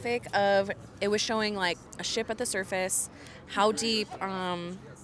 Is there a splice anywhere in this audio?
no; 0 cuts

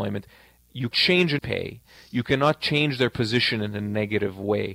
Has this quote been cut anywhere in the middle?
yes; 2 cuts; at 0.9 s, 1.4 s

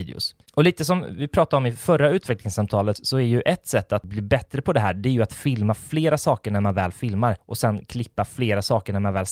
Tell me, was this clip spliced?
no; 0 cuts

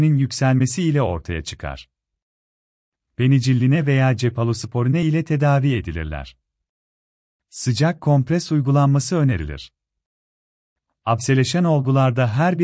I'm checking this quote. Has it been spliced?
no; 0 cuts

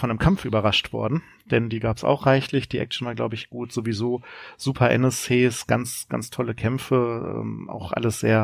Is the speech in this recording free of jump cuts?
yes; 0 cuts

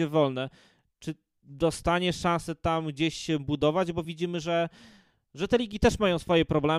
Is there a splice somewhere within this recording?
no; 0 cuts

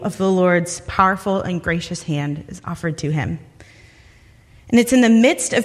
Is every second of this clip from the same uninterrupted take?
yes; 0 cuts

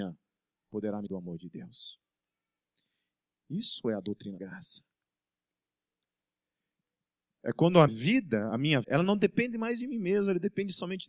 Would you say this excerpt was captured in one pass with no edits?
no; 4 cuts; at 1.1 s, 4.4 s, 7.9 s, 8.8 s

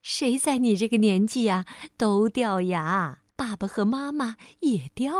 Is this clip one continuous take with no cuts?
no; 1 cut; at 3.3 s

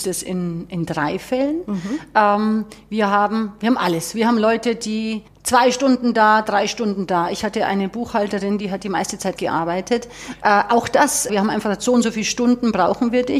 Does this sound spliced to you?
yes; 3 cuts; at 5.3 s, 9.4 s, 11.3 s

